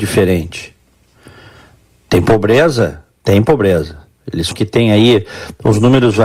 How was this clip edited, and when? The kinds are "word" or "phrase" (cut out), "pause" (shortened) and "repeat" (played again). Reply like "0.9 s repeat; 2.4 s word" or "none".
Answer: 4.5 s word